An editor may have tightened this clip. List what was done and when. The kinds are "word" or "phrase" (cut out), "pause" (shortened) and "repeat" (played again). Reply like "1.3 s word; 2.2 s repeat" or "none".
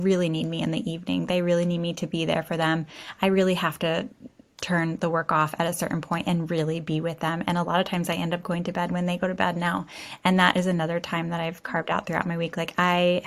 none